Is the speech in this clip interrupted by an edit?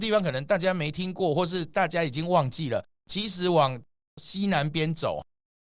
no; 0 cuts

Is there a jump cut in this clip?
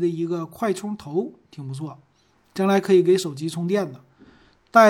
no; 0 cuts

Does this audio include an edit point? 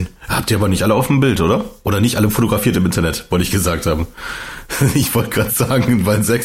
no; 0 cuts

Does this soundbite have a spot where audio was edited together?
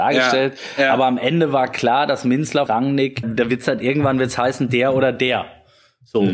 yes; 2 cuts; at 2.7 s, 3.2 s

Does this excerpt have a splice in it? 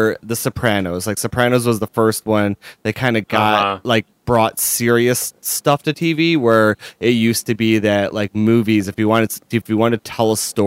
no; 0 cuts

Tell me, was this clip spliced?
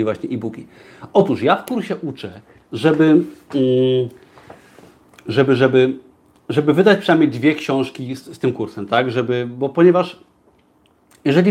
no; 0 cuts

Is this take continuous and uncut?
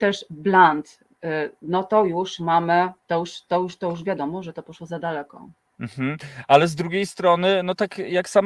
no; 2 cuts; at 3.0 s, 5.7 s

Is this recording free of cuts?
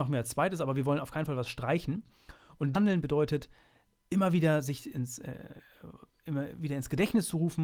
no; 2 cuts; at 2.7 s, 4.9 s

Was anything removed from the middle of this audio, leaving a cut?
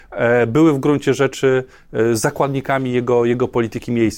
no; 0 cuts

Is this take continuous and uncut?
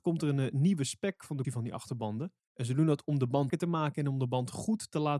no; 3 cuts; at 1.4 s, 2.4 s, 3.5 s

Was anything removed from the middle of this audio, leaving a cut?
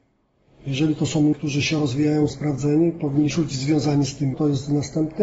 yes; 4 cuts; at 1.3 s, 2.3 s, 3.3 s, 4.3 s

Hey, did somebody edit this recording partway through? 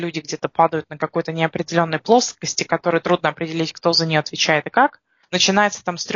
no; 0 cuts

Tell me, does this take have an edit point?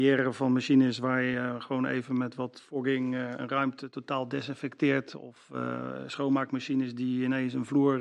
no; 0 cuts

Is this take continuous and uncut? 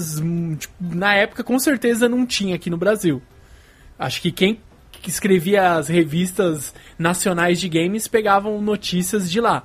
yes; 0 cuts

